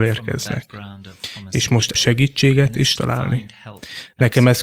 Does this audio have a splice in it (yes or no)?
yes